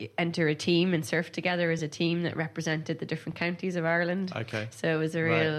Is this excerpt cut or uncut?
uncut